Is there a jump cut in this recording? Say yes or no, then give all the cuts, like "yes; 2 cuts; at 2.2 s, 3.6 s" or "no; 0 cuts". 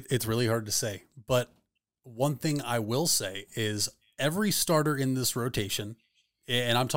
no; 0 cuts